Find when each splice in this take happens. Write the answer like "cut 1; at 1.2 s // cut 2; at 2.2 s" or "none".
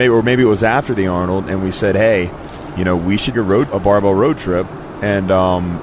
cut 1; at 3.3 s // cut 2; at 3.7 s

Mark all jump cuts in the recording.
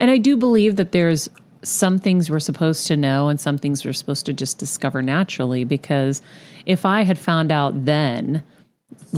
none

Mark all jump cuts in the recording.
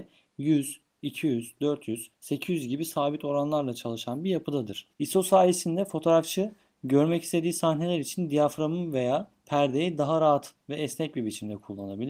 cut 1; at 2.1 s // cut 2; at 4.9 s

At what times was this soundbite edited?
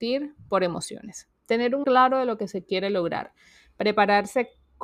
cut 1; at 1.8 s

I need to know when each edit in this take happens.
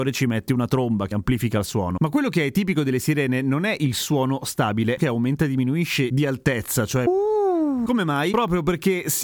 cut 1; at 1.1 s // cut 2; at 5.0 s

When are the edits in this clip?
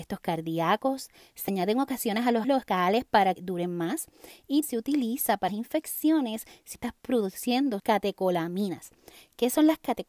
cut 1; at 1.5 s // cut 2; at 2.4 s // cut 3; at 3.4 s // cut 4; at 4.6 s // cut 5; at 5.5 s // cut 6; at 6.7 s // cut 7; at 7.8 s

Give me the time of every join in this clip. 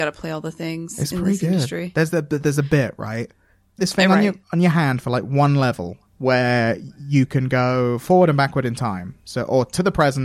cut 1; at 3.8 s // cut 2; at 4.4 s // cut 3; at 6.1 s

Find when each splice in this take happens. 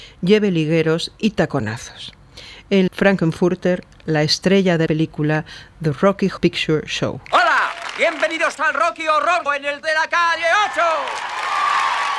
cut 1; at 2.9 s // cut 2; at 4.9 s // cut 3; at 6.4 s // cut 4; at 8.6 s // cut 5; at 9.5 s // cut 6; at 9.8 s

